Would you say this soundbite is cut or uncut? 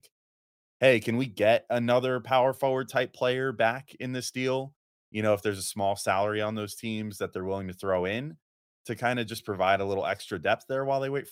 uncut